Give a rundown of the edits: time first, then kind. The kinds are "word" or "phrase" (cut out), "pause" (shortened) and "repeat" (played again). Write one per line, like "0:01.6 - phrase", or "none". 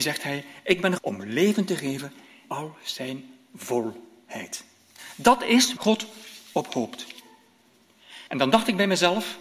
0:01.0 - word
0:02.4 - word
0:05.8 - word
0:08.3 - pause